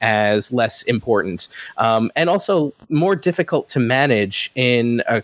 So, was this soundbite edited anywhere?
yes; 1 cut; at 2.8 s

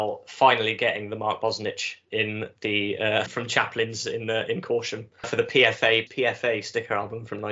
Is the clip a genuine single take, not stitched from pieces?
no; 3 cuts; at 3.3 s, 5.2 s, 6.1 s

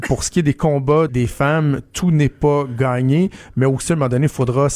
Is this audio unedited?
no; 1 cut; at 1.1 s

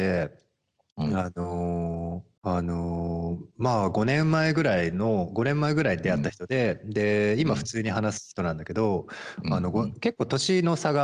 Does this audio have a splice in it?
yes; 1 cut; at 2.4 s

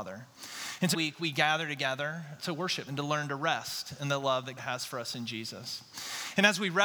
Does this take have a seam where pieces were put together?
yes; 4 cuts; at 0.9 s, 2.4 s, 2.9 s, 4.6 s

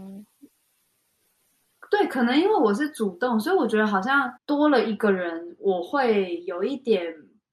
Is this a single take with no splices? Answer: no; 1 cut; at 4.4 s

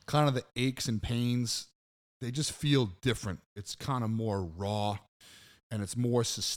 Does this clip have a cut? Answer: no; 0 cuts

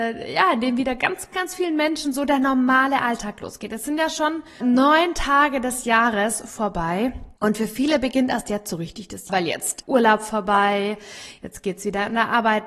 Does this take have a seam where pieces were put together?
yes; 5 cuts; at 1.3 s, 4.6 s, 7.4 s, 9.3 s, 9.8 s

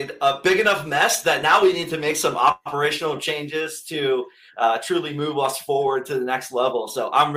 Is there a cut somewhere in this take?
no; 0 cuts

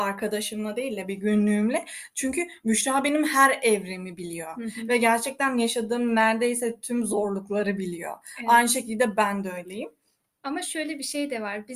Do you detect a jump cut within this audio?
no; 0 cuts

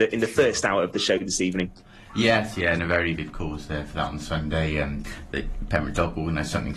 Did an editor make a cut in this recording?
yes; 1 cut; at 3.1 s

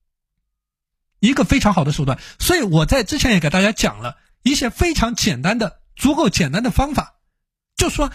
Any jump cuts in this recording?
no; 0 cuts

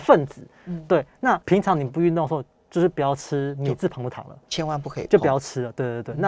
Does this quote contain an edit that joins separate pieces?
yes; 1 cut; at 1.4 s

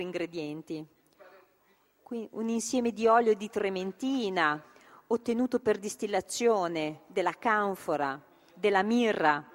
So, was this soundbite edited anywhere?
no; 0 cuts

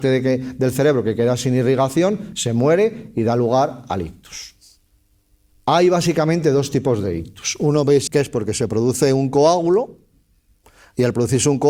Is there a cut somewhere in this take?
yes; 1 cut; at 8.1 s

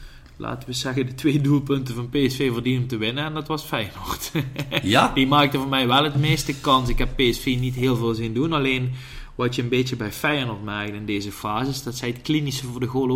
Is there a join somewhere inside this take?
no; 0 cuts

